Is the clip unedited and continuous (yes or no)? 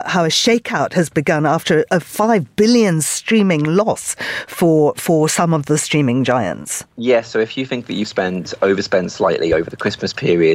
no